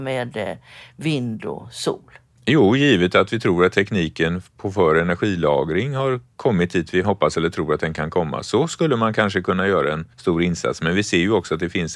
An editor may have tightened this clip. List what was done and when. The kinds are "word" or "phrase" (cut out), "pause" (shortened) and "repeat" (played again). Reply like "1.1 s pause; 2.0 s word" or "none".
7.0 s word; 10.1 s pause